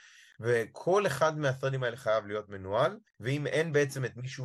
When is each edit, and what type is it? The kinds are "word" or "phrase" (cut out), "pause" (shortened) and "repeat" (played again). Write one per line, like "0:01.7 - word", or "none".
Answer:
0:03.1 - pause